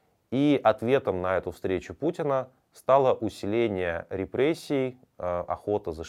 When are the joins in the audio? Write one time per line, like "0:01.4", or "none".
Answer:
none